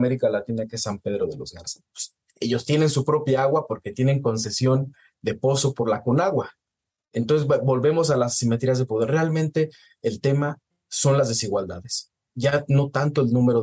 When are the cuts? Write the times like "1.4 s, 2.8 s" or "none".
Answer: none